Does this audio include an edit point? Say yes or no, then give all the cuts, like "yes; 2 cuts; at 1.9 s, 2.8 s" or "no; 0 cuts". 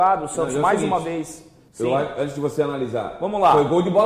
yes; 1 cut; at 1.7 s